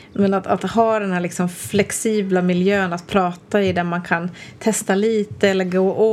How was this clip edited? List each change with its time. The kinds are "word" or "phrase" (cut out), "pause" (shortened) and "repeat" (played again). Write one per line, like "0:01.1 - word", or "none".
none